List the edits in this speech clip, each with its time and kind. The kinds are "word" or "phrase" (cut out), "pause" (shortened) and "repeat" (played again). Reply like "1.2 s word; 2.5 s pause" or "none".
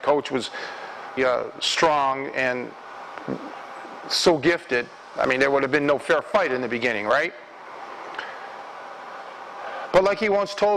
1.2 s word